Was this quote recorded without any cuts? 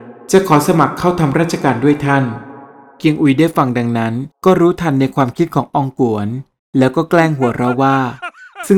no; 1 cut; at 4.3 s

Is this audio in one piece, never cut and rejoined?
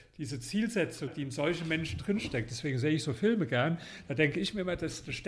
no; 1 cut; at 1.1 s

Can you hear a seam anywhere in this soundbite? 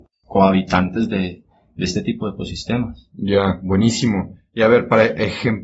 no; 0 cuts

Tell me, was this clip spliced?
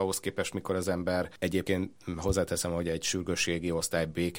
no; 0 cuts

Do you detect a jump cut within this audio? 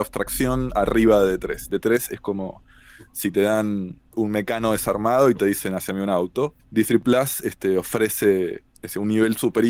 yes; 3 cuts; at 4.1 s, 6.6 s, 8.7 s

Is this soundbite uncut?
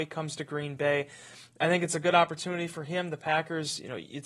yes; 0 cuts

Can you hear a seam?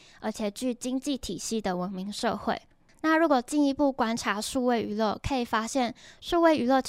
no; 0 cuts

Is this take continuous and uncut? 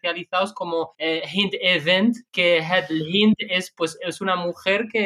yes; 0 cuts

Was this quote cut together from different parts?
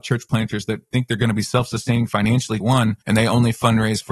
yes; 2 cuts; at 2.6 s, 3.0 s

